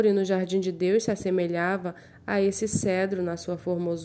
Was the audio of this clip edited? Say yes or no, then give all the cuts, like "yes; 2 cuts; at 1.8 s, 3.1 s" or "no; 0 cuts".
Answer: no; 0 cuts